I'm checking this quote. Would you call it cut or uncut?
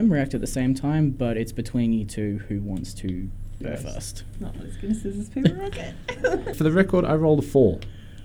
cut